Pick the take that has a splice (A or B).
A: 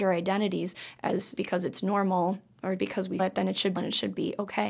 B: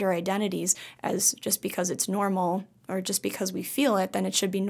A